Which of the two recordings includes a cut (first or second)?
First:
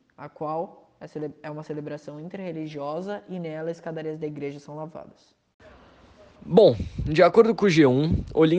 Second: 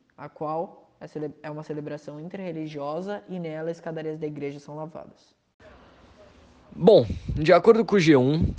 first